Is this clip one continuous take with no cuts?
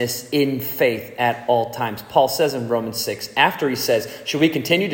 yes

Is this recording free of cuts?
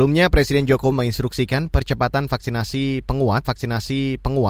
no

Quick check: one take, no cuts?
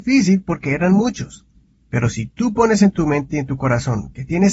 yes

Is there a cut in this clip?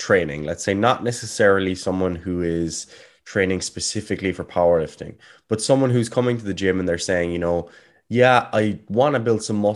no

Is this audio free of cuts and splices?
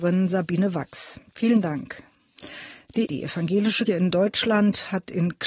no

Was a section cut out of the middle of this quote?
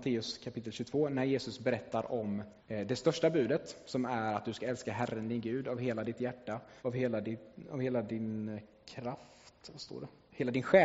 yes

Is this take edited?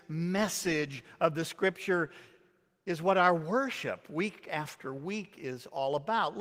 no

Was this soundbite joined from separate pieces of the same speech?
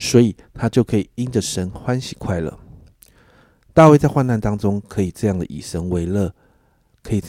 no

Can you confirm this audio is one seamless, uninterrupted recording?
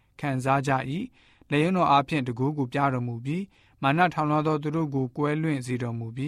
yes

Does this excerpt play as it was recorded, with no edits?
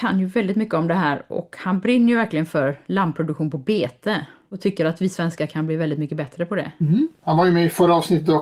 yes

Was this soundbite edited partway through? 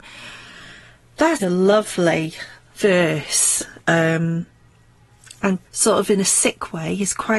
yes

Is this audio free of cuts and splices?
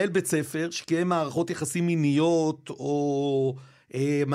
yes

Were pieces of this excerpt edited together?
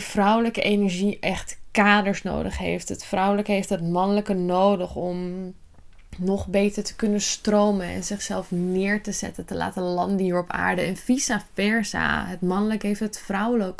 no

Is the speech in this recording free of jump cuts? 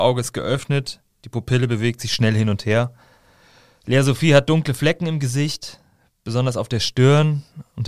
yes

